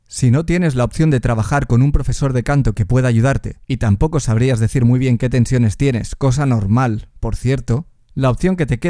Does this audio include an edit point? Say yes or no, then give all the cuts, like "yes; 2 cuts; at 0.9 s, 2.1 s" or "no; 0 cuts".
yes; 1 cut; at 3.6 s